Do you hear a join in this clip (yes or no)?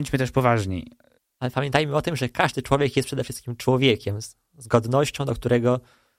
no